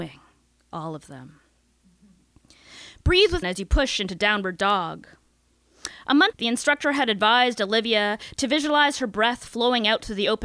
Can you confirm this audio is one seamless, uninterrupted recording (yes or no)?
no